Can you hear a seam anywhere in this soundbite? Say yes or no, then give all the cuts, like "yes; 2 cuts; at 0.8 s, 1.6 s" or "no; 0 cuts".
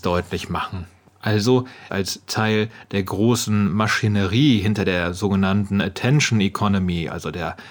yes; 1 cut; at 1.9 s